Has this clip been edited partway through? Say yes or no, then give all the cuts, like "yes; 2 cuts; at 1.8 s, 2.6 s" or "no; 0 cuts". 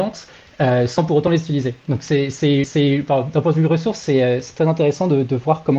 yes; 1 cut; at 2.6 s